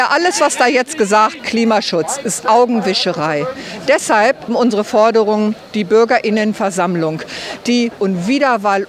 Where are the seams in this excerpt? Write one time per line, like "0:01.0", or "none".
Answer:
0:01.4
0:04.5
0:08.0